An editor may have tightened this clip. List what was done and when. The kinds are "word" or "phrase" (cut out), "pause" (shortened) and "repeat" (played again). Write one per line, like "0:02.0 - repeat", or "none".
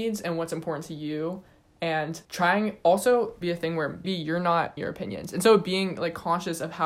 0:02.2 - pause
0:03.4 - phrase
0:04.0 - word
0:04.8 - phrase